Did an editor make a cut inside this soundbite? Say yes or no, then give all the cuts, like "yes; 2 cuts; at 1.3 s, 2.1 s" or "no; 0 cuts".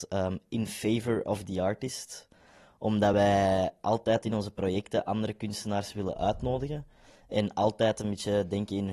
no; 0 cuts